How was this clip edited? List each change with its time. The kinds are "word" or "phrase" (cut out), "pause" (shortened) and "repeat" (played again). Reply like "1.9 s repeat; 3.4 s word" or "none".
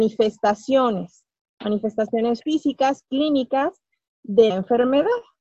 4.5 s word